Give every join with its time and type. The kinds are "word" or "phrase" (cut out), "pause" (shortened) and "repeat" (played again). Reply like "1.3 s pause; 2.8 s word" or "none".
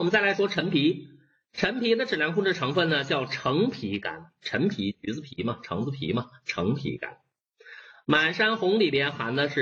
none